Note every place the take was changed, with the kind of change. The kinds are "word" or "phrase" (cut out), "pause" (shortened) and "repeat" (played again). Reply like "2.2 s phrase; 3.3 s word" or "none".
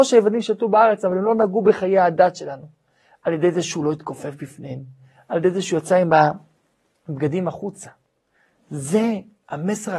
none

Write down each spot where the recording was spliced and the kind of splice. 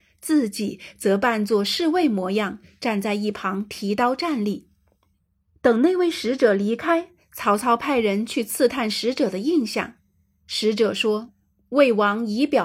11.4 s pause

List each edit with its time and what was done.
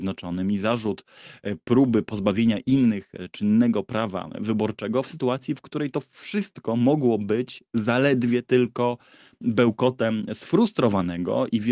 none

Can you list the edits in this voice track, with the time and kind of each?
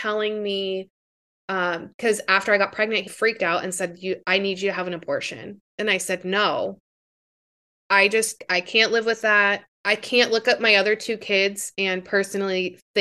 3.1 s word; 5.7 s pause; 9.7 s pause

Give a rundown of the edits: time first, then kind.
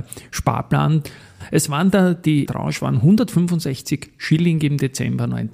2.4 s word

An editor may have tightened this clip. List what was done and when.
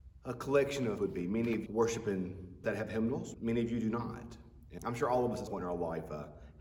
1.0 s word; 1.7 s word; 2.6 s word; 3.3 s word; 4.8 s word; 5.5 s word

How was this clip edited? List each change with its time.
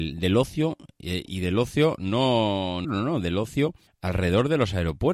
2.8 s phrase; 3.9 s pause

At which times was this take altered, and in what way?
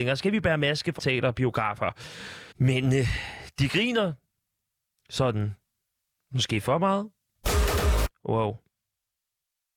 1.0 s phrase; 2.5 s pause

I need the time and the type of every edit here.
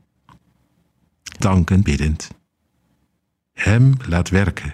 1.4 s word; 1.8 s word

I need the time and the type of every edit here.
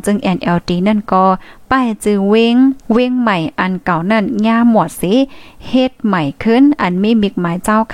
2.8 s pause

